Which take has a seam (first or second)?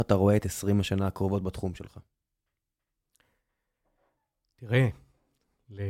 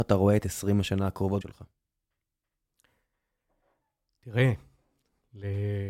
second